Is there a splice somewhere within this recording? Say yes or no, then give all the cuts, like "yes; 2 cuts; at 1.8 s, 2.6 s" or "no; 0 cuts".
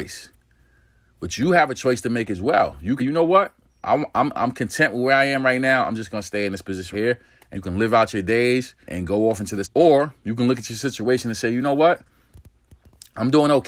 yes; 6 cuts; at 3.0 s, 4.3 s, 6.9 s, 7.5 s, 8.9 s, 9.6 s